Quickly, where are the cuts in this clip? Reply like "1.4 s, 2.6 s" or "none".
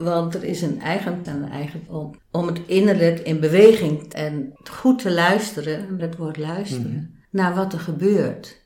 1.2 s, 1.9 s, 2.2 s, 4.1 s, 4.6 s, 6.0 s, 7.2 s